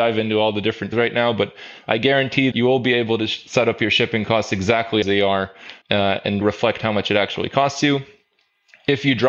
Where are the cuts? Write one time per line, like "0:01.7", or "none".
0:00.9
0:02.5
0:05.0
0:05.8
0:06.4